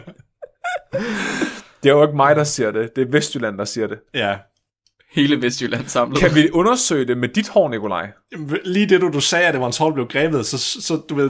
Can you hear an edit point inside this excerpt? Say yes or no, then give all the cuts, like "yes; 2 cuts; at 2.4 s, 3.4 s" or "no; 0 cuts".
no; 0 cuts